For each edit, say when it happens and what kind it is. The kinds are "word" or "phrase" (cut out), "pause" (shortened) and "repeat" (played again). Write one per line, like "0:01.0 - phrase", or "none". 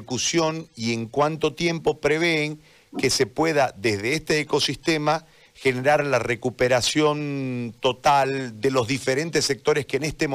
none